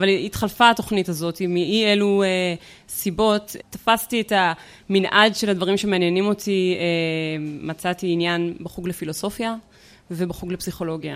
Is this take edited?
no; 0 cuts

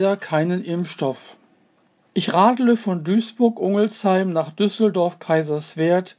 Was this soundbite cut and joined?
no; 0 cuts

